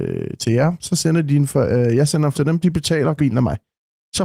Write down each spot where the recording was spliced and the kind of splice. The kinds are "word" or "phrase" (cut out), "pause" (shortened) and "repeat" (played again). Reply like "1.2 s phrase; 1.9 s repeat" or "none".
2.3 s word; 3.2 s word